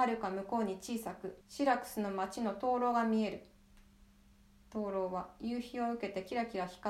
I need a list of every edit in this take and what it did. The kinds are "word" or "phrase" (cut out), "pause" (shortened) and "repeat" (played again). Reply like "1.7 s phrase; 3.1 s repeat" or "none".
1.4 s pause